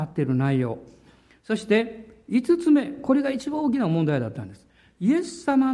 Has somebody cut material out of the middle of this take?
no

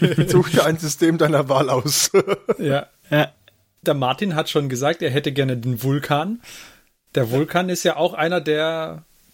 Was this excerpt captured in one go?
yes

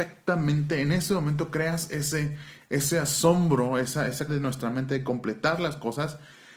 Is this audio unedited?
no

